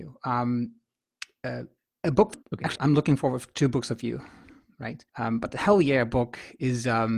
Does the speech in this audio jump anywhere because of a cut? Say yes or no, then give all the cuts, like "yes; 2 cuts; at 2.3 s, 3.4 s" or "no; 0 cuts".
yes; 4 cuts; at 1.8 s, 2.4 s, 2.8 s, 5.1 s